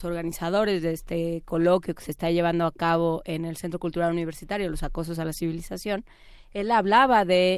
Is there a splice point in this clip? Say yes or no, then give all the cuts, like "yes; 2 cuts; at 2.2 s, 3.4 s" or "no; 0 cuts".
no; 0 cuts